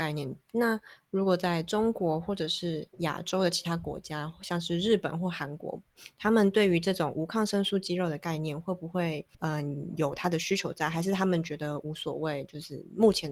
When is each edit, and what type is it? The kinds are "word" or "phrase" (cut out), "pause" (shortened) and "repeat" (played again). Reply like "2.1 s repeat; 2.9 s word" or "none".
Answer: 2.9 s pause; 9.3 s pause